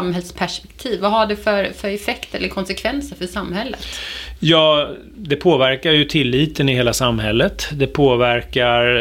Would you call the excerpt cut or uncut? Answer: uncut